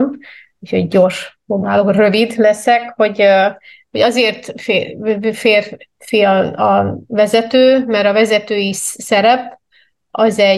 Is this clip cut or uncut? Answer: uncut